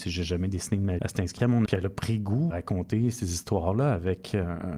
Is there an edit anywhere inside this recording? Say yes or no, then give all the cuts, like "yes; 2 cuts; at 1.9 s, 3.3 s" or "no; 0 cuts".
yes; 3 cuts; at 1.0 s, 1.7 s, 2.5 s